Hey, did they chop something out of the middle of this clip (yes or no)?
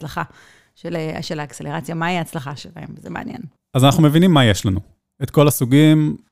no